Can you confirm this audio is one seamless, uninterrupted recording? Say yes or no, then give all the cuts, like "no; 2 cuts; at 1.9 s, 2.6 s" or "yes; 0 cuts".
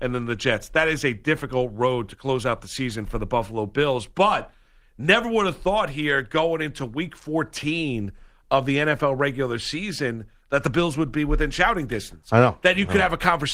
yes; 0 cuts